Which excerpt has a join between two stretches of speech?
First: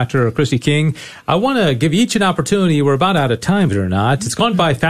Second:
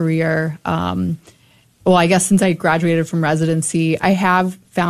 first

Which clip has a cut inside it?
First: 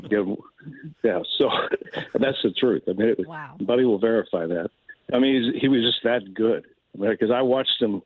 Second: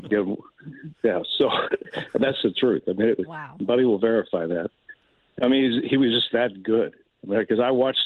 first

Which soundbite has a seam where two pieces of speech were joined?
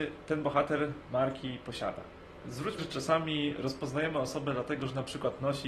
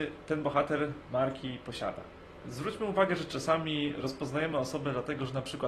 first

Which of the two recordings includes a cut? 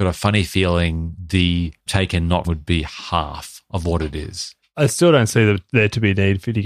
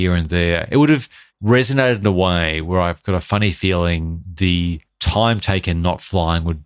first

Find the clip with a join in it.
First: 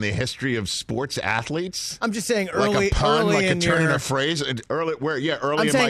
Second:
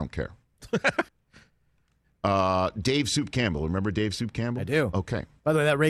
second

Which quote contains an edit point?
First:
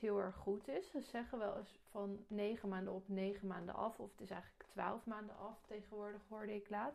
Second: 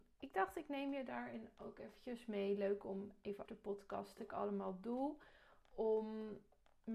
second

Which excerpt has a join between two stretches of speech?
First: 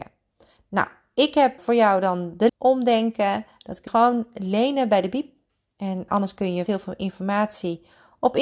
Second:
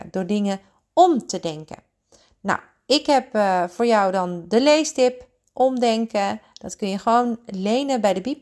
first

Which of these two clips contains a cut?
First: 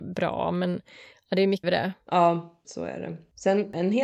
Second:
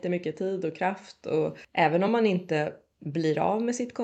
first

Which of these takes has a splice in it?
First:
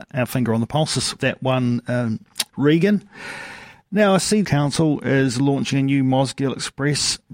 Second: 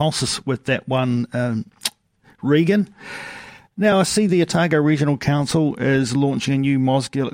first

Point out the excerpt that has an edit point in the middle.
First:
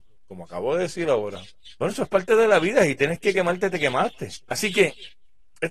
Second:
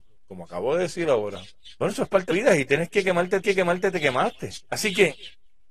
second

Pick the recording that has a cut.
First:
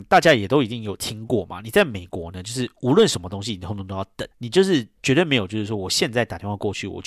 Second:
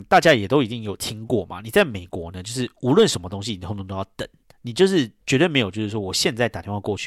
first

